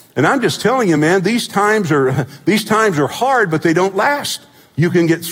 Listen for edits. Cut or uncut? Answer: uncut